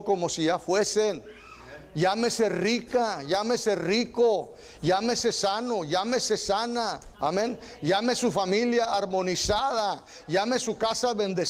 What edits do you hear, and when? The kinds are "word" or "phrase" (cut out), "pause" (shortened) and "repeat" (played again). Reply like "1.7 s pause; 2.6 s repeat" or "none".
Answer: 7.1 s pause